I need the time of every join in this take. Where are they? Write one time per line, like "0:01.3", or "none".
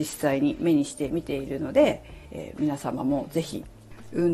0:02.3